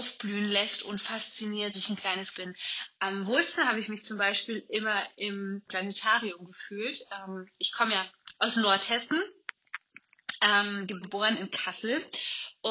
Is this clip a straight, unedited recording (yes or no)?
no